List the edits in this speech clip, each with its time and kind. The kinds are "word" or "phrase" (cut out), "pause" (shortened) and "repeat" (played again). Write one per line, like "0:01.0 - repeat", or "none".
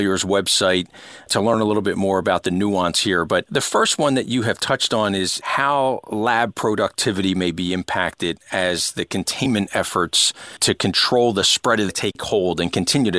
0:11.9 - phrase